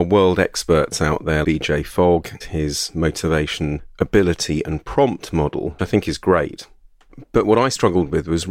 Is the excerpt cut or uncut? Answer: cut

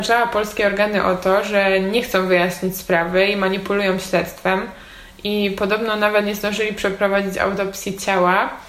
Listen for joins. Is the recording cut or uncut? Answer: uncut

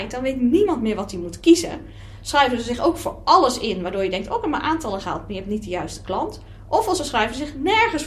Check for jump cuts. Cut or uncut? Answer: uncut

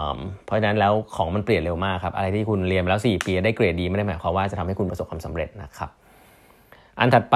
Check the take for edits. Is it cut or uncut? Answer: uncut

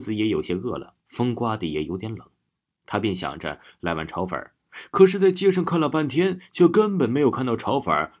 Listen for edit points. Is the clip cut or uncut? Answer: cut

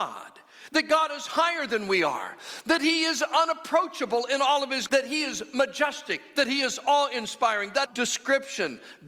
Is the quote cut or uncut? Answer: cut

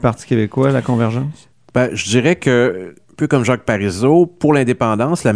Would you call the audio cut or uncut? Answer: cut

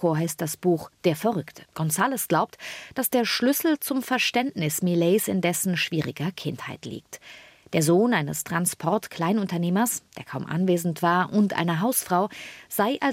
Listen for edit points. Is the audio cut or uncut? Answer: cut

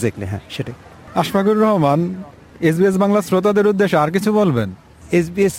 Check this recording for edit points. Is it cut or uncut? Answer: uncut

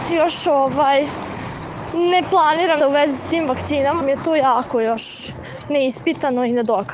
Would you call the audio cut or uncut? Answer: cut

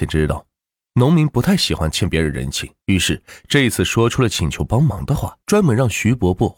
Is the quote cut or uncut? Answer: cut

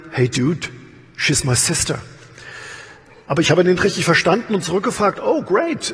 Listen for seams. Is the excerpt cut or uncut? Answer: uncut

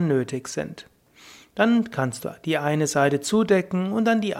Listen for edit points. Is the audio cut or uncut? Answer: uncut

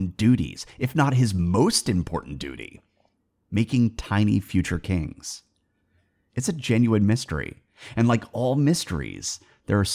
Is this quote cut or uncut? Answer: uncut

